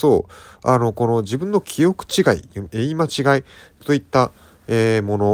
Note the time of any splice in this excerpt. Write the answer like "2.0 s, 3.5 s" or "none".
none